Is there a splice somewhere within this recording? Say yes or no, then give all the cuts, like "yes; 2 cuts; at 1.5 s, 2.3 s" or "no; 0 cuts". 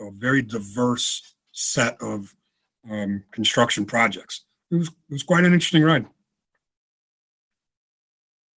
no; 0 cuts